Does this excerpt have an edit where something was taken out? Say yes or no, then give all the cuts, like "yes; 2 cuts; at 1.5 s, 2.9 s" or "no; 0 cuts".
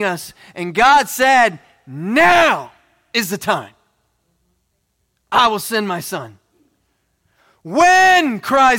no; 0 cuts